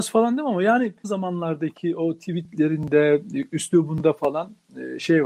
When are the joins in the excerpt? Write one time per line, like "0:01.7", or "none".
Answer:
0:01.0